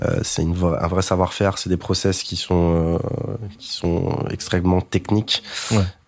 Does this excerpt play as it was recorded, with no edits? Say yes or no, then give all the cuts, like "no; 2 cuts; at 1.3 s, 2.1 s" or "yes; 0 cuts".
yes; 0 cuts